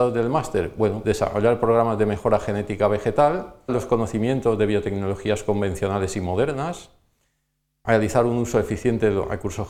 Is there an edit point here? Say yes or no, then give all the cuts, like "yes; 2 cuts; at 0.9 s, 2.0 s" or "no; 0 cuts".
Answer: yes; 2 cuts; at 1.0 s, 3.7 s